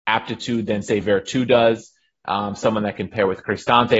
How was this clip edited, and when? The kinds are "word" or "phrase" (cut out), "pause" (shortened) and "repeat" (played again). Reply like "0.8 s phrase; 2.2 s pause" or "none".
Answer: none